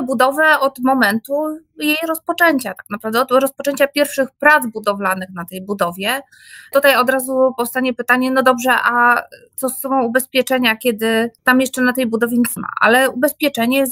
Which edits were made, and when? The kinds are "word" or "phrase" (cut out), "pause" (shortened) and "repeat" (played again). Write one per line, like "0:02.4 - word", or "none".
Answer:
0:11.4 - pause
0:12.6 - word